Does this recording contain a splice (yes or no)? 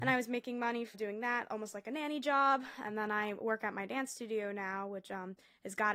yes